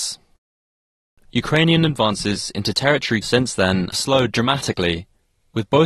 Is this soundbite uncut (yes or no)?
no